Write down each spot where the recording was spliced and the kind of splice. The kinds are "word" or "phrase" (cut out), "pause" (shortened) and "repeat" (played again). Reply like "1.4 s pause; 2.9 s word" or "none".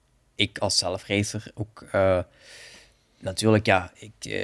none